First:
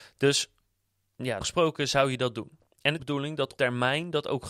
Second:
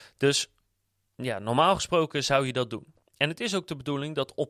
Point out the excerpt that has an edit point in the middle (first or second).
first